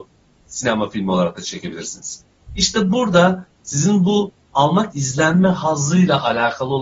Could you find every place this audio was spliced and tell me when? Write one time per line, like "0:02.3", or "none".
0:04.9

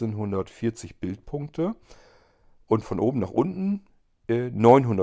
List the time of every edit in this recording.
none

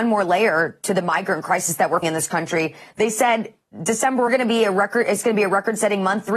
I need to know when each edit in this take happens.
0:02.0
0:04.3

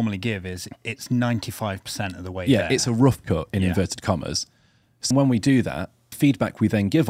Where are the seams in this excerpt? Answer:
0:05.1
0:06.1

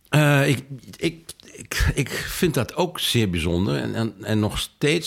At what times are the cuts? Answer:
none

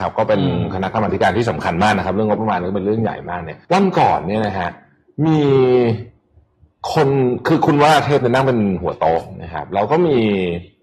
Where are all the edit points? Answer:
0:03.6

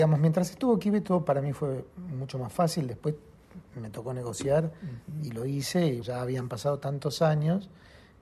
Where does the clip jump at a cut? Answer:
0:06.0

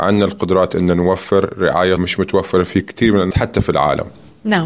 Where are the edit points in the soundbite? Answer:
0:02.0
0:03.3

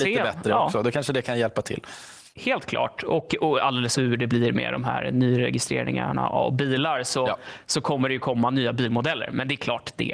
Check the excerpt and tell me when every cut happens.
0:02.3
0:03.9

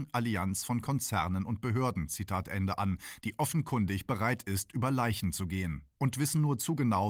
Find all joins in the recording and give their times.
none

